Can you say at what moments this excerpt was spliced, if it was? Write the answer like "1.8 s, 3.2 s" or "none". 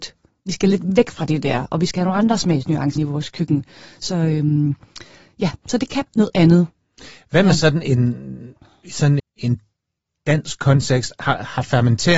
3.0 s, 6.1 s, 9.2 s